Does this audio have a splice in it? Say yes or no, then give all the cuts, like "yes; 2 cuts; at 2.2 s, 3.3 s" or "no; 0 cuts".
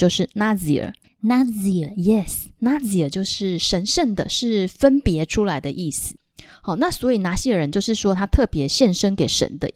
no; 0 cuts